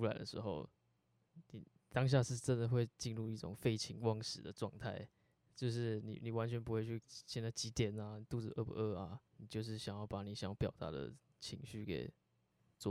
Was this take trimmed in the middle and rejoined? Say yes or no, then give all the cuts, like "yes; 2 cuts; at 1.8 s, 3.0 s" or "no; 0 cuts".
yes; 3 cuts; at 5.3 s, 7.0 s, 9.3 s